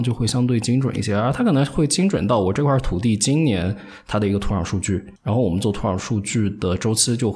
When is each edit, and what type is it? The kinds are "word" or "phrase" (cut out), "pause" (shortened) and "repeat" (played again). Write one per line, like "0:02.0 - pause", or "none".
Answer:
0:05.2 - pause